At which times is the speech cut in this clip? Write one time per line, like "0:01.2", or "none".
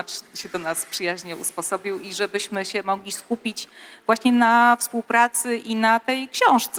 none